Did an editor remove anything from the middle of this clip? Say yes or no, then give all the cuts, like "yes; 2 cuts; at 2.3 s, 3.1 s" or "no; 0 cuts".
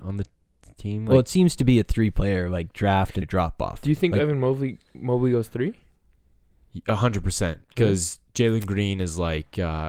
yes; 1 cut; at 3.2 s